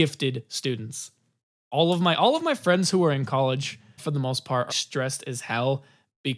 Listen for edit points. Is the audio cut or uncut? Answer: cut